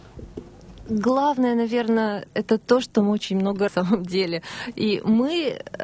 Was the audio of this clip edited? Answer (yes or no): yes